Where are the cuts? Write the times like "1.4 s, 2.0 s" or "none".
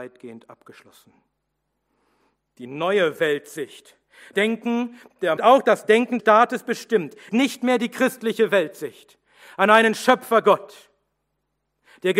4.3 s, 5.4 s, 6.2 s, 7.3 s